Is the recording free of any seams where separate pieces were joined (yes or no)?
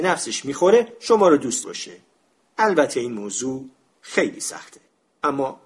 no